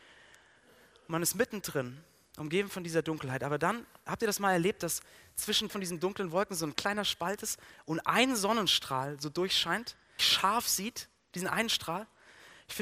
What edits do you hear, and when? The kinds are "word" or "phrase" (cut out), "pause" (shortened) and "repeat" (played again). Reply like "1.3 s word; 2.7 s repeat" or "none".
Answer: 5.7 s word; 6.8 s word; 10.2 s phrase